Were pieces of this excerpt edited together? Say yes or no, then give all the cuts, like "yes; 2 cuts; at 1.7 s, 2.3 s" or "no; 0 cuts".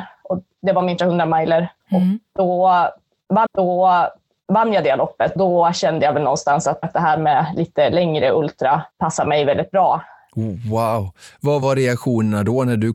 yes; 7 cuts; at 1.0 s, 1.8 s, 3.5 s, 5.4 s, 6.8 s, 8.9 s, 11.6 s